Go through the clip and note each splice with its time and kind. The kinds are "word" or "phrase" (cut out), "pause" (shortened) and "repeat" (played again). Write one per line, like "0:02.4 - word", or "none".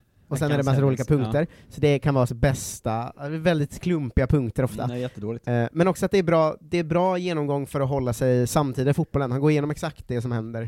0:02.3 - phrase